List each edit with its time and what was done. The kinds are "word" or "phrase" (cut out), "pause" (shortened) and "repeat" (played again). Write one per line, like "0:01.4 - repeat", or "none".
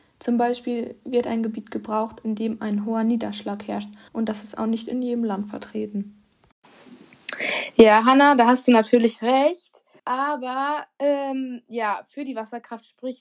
0:04.1 - pause
0:10.0 - pause